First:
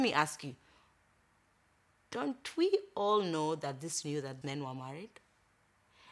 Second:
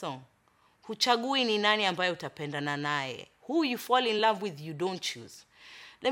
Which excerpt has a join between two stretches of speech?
first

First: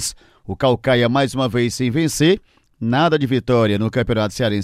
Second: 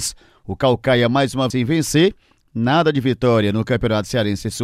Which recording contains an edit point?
second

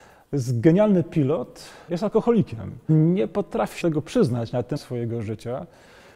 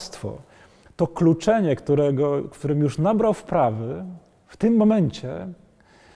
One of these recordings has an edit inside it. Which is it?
first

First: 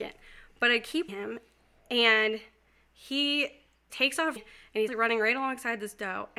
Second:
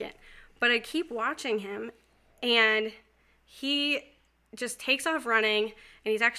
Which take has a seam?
first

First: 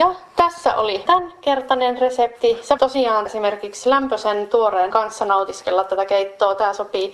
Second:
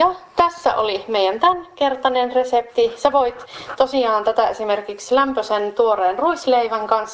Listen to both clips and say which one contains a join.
first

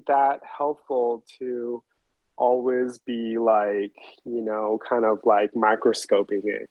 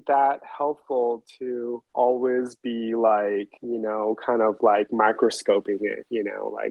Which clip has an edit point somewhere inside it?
second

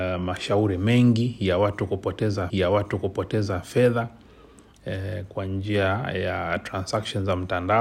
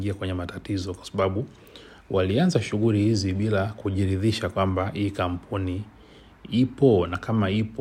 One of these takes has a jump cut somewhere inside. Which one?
first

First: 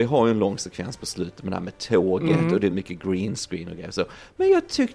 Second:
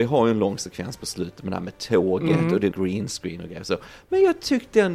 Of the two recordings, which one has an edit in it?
second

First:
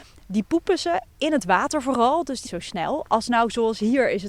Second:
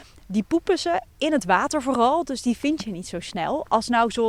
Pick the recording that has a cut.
first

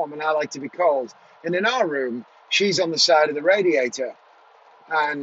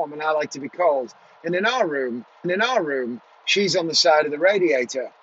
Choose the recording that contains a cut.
second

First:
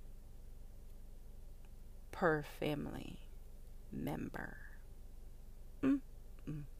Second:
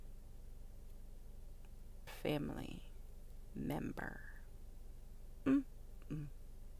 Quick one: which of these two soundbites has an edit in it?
second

